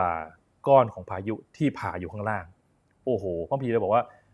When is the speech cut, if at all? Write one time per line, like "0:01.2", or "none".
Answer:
none